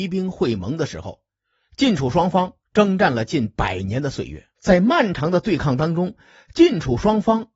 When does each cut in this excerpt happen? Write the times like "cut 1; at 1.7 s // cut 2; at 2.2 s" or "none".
cut 1; at 2.6 s // cut 2; at 4.6 s